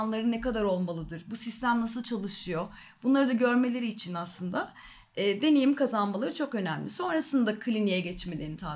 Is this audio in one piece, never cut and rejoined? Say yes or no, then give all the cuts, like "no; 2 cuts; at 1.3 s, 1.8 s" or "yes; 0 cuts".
yes; 0 cuts